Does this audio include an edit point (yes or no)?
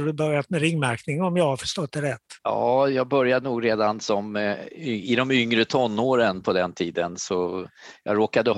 yes